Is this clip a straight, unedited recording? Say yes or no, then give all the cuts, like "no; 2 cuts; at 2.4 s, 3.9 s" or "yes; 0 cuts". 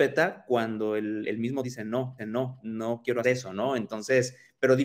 no; 4 cuts; at 1.2 s, 1.6 s, 2.2 s, 3.2 s